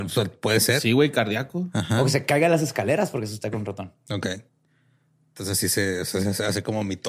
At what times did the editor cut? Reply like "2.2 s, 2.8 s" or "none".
none